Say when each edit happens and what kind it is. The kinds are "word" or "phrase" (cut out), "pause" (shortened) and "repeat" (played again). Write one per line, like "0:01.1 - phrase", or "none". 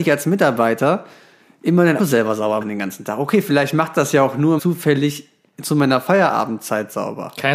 0:02.0 - word
0:02.6 - word
0:04.6 - word